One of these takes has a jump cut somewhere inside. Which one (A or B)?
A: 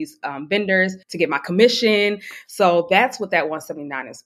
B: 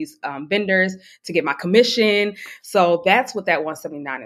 A